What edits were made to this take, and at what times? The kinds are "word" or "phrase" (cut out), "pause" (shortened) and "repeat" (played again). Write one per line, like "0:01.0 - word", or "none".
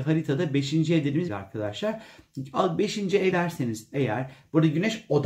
0:01.3 - phrase
0:03.3 - word